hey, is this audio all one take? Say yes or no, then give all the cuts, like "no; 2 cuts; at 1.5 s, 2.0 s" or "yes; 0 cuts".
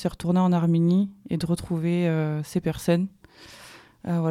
yes; 0 cuts